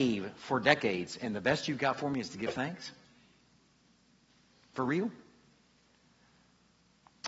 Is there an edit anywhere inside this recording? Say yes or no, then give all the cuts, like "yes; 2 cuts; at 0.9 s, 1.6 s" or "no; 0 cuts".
no; 0 cuts